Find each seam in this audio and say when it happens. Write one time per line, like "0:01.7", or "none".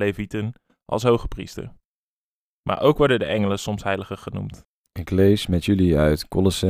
none